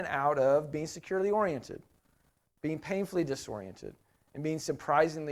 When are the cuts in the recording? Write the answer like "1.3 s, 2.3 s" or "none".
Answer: none